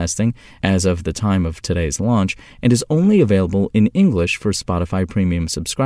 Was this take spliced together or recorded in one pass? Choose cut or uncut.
uncut